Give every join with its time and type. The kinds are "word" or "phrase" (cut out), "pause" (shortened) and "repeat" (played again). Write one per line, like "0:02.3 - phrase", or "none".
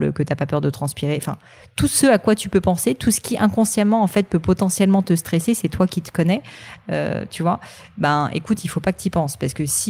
none